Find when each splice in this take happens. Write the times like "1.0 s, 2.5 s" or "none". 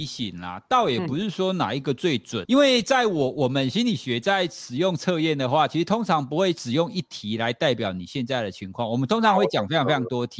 2.4 s